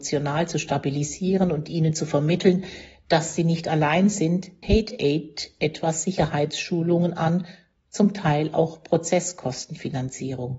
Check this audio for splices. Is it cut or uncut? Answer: cut